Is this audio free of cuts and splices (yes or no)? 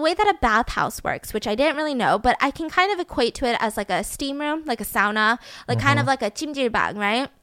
yes